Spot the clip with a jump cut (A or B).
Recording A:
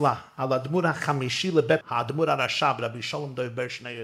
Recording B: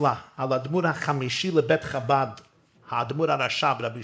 A